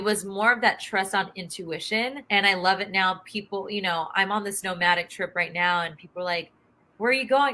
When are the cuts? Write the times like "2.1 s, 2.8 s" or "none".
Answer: 2.3 s

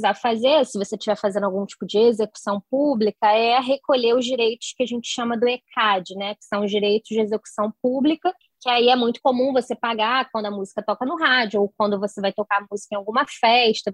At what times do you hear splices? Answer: 8.4 s

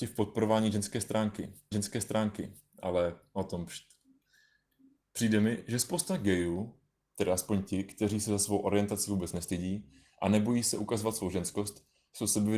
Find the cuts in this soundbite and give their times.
1.7 s

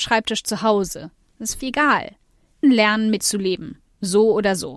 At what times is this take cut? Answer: 1.6 s, 2.6 s, 3.2 s

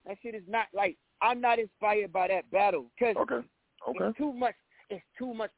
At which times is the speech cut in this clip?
1.0 s, 2.9 s

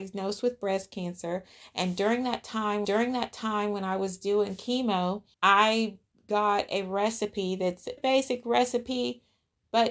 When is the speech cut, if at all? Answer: 2.8 s, 5.3 s, 8.0 s

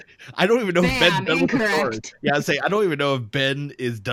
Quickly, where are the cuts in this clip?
none

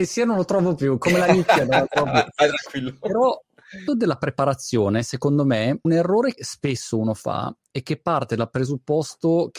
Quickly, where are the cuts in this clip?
3.9 s, 5.8 s, 6.4 s

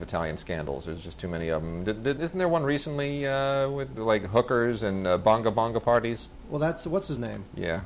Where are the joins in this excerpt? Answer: 2.2 s, 4.0 s

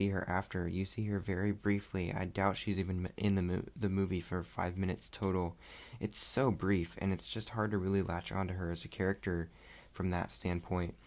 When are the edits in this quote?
none

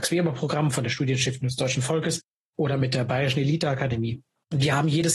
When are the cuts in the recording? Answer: none

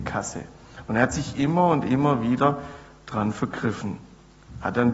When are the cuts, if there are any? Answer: none

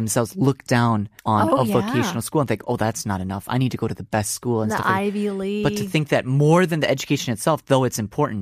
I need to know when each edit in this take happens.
1.2 s

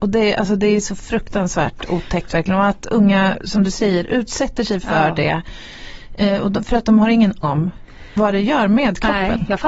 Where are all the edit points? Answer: 7.4 s

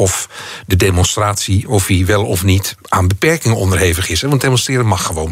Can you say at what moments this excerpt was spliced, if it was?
none

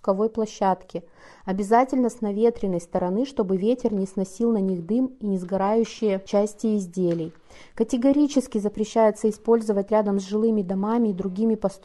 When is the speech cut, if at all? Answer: none

